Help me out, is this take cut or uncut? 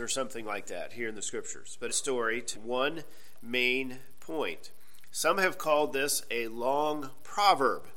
cut